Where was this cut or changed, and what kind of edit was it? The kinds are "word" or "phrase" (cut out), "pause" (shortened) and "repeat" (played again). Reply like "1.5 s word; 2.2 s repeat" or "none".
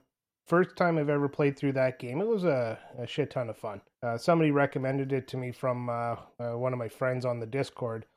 3.9 s pause; 6.3 s pause